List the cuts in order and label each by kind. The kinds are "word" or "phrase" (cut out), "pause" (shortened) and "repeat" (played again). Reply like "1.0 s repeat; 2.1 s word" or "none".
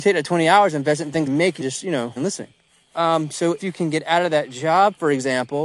1.3 s word; 1.6 s phrase; 2.2 s word; 2.7 s pause; 3.6 s word